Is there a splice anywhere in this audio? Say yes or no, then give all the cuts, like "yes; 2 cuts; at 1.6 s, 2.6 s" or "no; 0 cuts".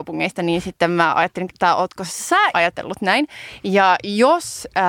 yes; 2 cuts; at 1.5 s, 2.5 s